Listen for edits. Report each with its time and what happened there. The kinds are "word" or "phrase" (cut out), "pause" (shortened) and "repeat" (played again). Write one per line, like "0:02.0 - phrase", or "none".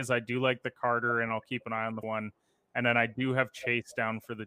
0:02.0 - word